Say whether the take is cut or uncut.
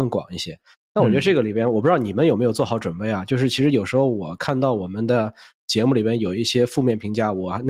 uncut